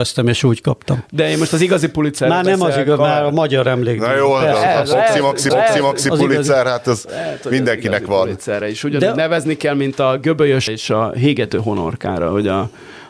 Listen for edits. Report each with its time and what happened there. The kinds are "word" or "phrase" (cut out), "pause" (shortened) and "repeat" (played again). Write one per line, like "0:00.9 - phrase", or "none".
0:05.5 - repeat
0:10.7 - word